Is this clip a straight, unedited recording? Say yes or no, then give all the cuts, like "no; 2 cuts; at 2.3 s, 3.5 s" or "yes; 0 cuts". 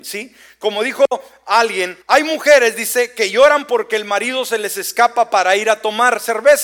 no; 1 cut; at 2.0 s